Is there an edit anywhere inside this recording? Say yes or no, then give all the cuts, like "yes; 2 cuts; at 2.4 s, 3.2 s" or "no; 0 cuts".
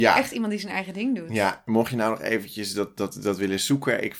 no; 0 cuts